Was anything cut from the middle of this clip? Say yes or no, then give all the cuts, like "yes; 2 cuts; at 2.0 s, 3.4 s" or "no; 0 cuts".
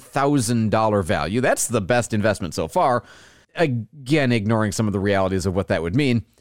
no; 0 cuts